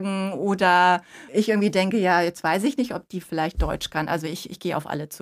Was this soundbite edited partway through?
yes; 2 cuts; at 1.3 s, 3.2 s

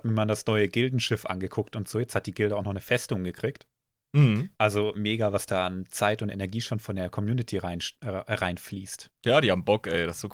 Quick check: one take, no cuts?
no; 2 cuts; at 4.5 s, 9.2 s

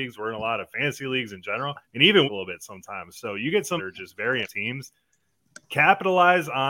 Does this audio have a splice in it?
yes; 5 cuts; at 1.8 s, 2.2 s, 3.8 s, 4.4 s, 5.6 s

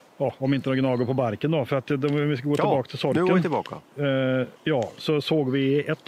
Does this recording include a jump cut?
yes; 2 cuts; at 3.9 s, 4.6 s

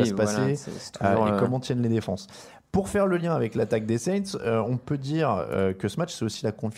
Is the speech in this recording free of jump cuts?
yes; 0 cuts

